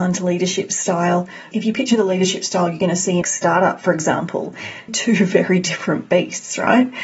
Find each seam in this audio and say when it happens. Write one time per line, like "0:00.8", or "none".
0:01.5
0:03.2
0:04.9